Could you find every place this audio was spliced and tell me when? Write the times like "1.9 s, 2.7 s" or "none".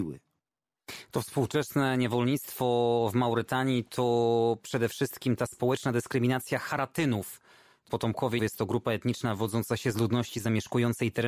7.9 s, 8.4 s